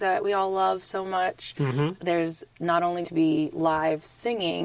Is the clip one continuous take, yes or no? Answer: no